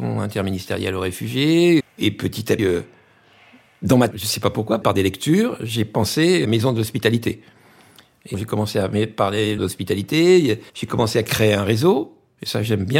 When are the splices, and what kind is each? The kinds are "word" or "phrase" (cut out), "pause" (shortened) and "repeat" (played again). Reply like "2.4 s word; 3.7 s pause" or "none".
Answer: 1.8 s word; 2.6 s word; 4.1 s phrase; 4.8 s word; 6.4 s word; 8.3 s phrase; 9.6 s word; 10.7 s pause